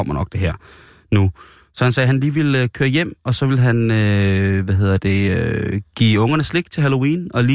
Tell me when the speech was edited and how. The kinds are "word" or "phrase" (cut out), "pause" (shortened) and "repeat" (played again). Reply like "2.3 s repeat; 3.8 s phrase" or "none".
none